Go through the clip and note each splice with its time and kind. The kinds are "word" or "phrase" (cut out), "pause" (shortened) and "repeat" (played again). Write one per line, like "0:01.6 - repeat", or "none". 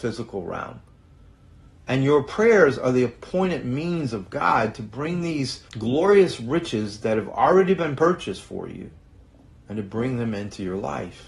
0:05.7 - pause
0:09.1 - pause